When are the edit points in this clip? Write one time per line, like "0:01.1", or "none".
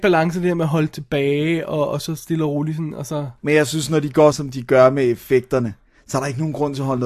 0:03.4
0:04.3